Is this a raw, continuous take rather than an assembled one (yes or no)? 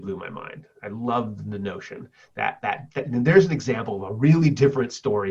yes